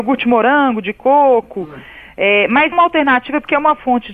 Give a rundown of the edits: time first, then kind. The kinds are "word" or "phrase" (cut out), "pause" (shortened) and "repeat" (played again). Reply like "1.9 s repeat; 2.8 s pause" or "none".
2.7 s word